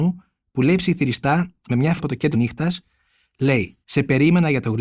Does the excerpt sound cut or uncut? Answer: cut